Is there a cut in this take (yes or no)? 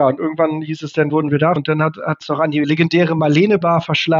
yes